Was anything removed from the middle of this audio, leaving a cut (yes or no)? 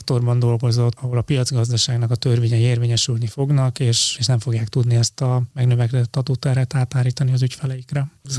yes